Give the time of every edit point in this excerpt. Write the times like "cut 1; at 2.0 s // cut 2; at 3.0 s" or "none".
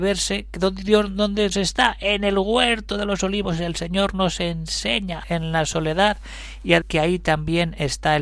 cut 1; at 1.5 s // cut 2; at 5.2 s // cut 3; at 6.8 s